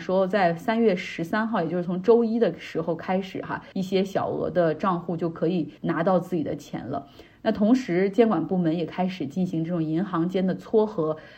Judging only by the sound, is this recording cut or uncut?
cut